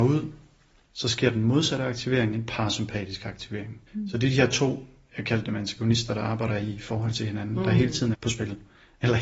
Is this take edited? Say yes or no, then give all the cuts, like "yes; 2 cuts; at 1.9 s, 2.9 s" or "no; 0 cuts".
yes; 2 cuts; at 3.9 s, 8.1 s